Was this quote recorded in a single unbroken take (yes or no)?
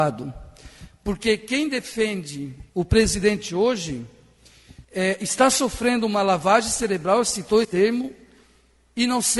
no